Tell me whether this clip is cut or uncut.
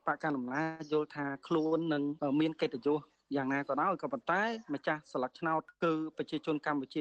uncut